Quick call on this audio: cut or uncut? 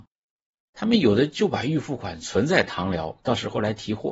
uncut